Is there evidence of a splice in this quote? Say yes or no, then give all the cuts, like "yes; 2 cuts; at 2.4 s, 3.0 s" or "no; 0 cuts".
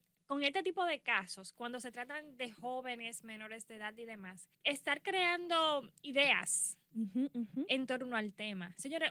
yes; 2 cuts; at 4.5 s, 6.0 s